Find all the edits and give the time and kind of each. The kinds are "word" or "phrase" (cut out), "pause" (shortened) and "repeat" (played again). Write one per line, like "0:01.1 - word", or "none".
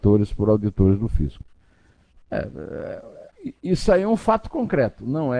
none

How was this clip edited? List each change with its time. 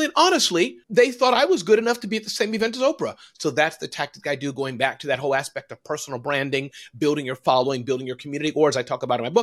none

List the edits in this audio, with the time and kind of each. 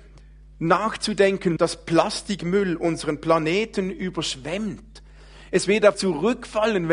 0:01.6 - word
0:05.9 - word

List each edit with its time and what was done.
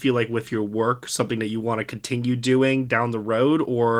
none

